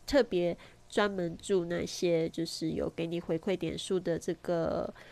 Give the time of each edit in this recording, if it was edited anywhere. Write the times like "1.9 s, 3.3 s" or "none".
none